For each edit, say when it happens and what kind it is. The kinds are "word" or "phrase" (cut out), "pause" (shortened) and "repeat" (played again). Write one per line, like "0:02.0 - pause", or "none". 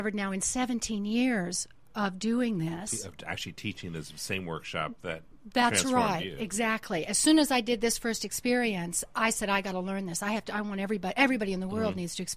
none